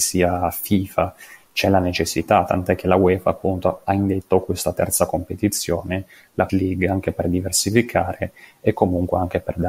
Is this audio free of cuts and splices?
no; 1 cut; at 6.5 s

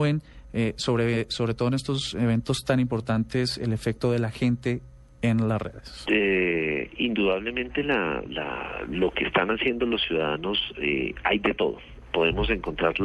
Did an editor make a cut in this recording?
no; 0 cuts

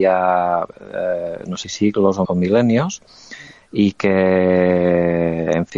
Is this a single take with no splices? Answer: no; 2 cuts; at 1.6 s, 2.2 s

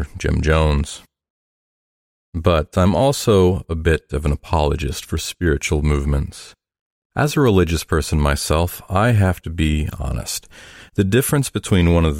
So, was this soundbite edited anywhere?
no; 0 cuts

